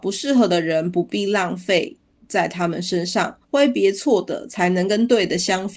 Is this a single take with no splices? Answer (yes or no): no